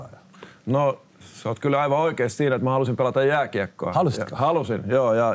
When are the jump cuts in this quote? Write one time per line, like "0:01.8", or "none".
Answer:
0:01.1